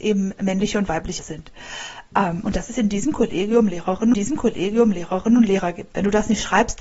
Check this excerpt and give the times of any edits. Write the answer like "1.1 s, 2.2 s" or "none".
1.2 s, 4.1 s